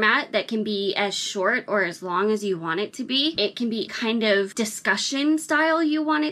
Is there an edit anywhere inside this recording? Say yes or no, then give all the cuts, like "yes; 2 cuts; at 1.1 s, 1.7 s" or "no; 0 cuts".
yes; 1 cut; at 3.9 s